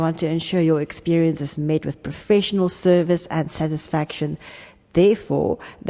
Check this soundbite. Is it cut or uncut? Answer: uncut